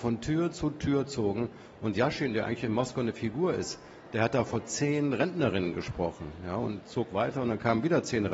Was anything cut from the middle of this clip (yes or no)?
yes